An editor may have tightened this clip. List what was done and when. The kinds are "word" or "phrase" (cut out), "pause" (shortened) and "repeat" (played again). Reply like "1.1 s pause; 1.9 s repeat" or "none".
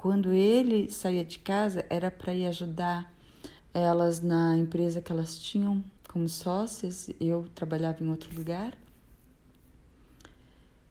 3.6 s pause; 6.0 s pause